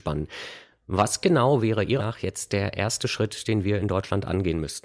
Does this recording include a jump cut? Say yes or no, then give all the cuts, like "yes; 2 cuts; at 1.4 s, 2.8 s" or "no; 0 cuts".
yes; 1 cut; at 2.0 s